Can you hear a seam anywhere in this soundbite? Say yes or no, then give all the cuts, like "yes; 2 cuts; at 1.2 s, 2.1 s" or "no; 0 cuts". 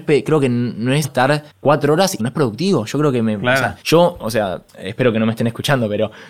yes; 5 cuts; at 1.0 s, 1.5 s, 2.2 s, 3.8 s, 4.7 s